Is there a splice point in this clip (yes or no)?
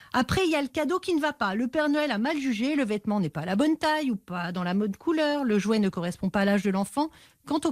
no